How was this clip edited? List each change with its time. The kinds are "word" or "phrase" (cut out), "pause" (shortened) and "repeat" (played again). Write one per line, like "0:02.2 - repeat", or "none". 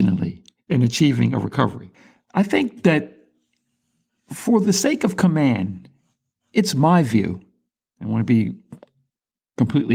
none